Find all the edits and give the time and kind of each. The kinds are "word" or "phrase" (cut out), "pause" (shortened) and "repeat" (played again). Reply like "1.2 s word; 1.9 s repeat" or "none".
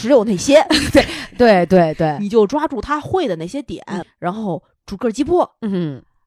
4.0 s word